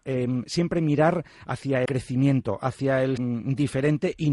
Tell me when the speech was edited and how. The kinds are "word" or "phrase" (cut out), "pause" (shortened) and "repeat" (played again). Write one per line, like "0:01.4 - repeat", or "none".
0:01.9 - word
0:03.2 - word